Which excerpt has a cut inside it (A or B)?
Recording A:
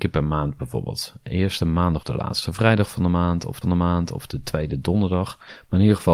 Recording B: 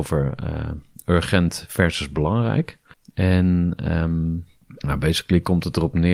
A